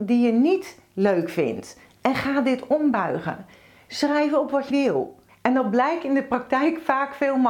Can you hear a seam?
yes; 2 cuts; at 4.7 s, 5.3 s

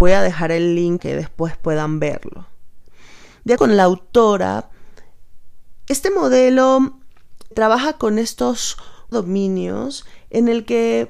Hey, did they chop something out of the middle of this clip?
yes; 4 cuts; at 1.0 s, 3.6 s, 7.5 s, 9.1 s

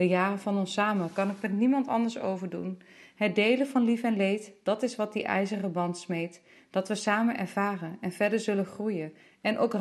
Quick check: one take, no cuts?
yes; 0 cuts

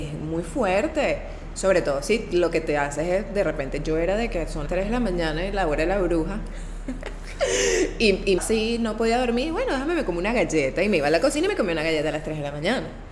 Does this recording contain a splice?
yes; 2 cuts; at 4.7 s, 8.4 s

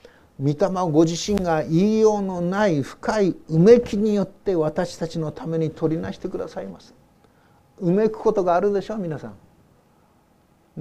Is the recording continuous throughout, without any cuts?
yes; 0 cuts

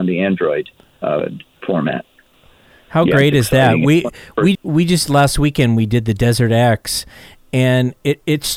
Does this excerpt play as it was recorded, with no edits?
no; 1 cut; at 4.5 s

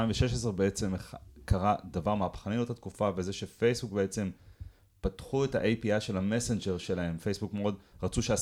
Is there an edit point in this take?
no; 0 cuts

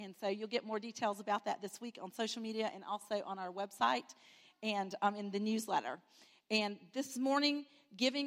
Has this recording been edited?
no; 0 cuts

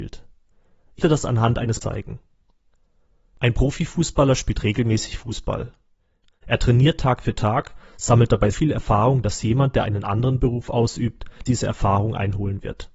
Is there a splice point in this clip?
yes; 4 cuts; at 1.0 s, 1.8 s, 8.5 s, 11.5 s

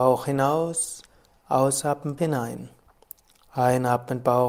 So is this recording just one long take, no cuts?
no; 1 cut; at 2.2 s

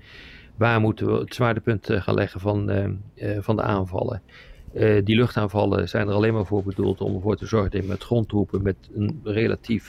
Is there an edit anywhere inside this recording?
no; 0 cuts

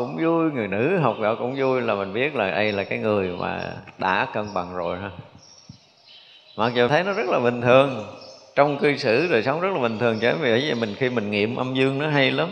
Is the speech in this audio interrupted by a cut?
yes; 1 cut; at 6.9 s

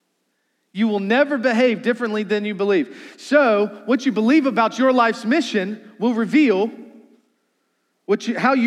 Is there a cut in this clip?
no; 0 cuts

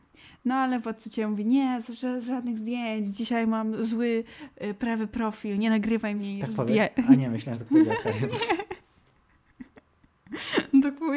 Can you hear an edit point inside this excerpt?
no; 0 cuts

